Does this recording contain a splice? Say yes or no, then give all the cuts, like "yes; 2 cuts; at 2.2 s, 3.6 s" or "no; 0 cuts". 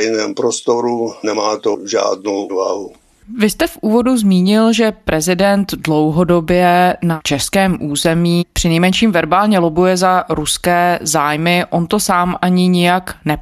yes; 1 cut; at 2.5 s